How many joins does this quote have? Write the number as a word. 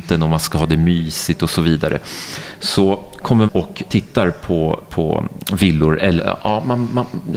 three